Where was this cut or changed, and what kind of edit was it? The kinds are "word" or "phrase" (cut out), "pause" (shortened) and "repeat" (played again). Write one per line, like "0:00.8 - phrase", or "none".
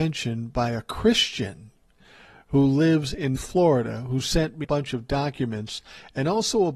0:03.4 - word
0:04.6 - word